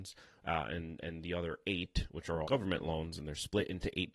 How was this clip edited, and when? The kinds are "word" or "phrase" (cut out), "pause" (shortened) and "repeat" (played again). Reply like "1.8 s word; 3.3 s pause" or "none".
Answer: 2.4 s word